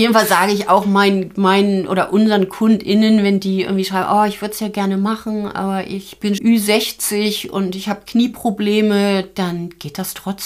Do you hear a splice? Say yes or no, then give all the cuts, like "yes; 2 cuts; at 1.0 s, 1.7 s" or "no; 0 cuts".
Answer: yes; 1 cut; at 6.4 s